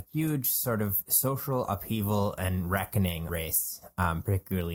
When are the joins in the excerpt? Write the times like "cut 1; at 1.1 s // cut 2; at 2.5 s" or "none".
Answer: cut 1; at 3.3 s